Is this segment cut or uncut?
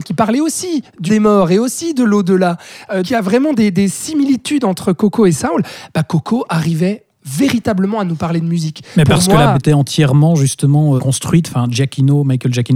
cut